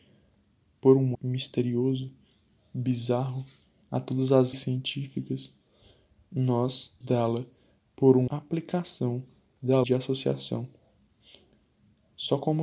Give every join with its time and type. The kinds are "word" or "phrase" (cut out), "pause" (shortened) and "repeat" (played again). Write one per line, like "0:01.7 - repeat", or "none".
0:01.1 - word
0:03.8 - word
0:04.5 - word
0:07.0 - word
0:08.3 - word
0:09.8 - word